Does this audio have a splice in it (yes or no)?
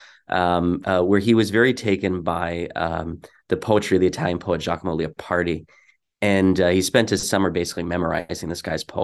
no